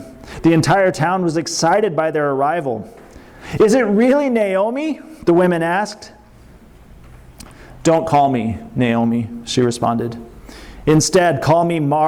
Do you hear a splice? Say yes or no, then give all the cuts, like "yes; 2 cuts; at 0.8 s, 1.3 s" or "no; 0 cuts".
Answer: no; 0 cuts